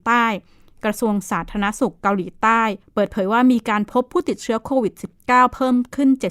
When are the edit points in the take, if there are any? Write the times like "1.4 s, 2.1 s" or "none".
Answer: 2.8 s

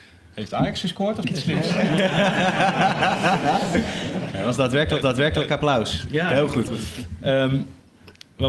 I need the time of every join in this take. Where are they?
1.2 s, 5.0 s, 6.7 s

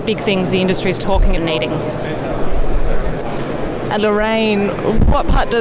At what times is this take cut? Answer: 1.4 s, 4.0 s

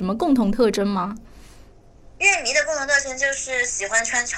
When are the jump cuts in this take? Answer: none

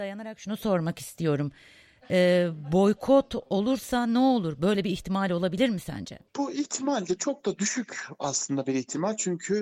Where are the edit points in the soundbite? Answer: 6.3 s

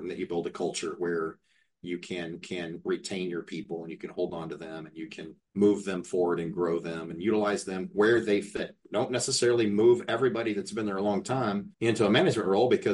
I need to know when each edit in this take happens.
2.4 s, 5.4 s, 11.7 s

